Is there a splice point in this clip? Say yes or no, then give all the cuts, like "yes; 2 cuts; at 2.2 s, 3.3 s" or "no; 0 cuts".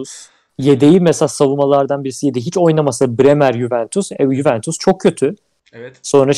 no; 0 cuts